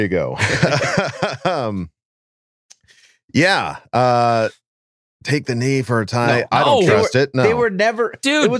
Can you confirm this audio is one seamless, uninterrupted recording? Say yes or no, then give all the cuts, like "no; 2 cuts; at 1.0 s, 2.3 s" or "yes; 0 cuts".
yes; 0 cuts